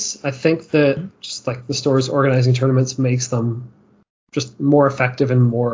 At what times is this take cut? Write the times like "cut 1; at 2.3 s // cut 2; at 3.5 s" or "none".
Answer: none